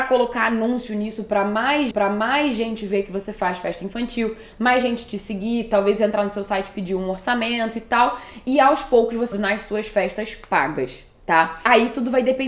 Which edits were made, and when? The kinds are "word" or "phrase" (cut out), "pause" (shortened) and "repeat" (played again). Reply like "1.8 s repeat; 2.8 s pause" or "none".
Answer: 1.9 s repeat; 9.3 s phrase